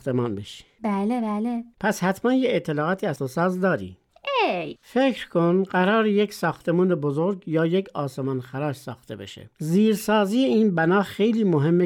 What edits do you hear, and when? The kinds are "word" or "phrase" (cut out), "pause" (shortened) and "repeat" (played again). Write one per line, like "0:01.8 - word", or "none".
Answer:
0:03.2 - word
0:09.5 - pause